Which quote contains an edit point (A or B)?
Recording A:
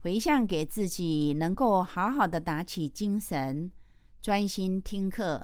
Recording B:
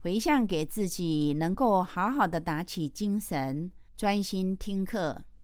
B